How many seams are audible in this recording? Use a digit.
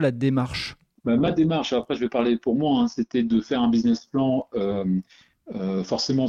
0